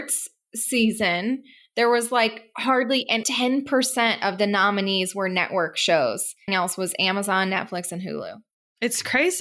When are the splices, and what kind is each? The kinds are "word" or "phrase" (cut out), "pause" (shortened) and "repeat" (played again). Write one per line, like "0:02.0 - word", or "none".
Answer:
0:03.2 - word
0:06.5 - word